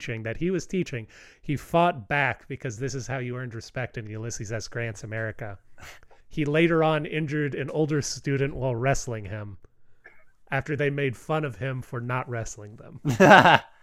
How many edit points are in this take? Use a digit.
1